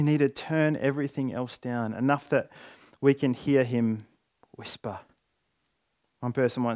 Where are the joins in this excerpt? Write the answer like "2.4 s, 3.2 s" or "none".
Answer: none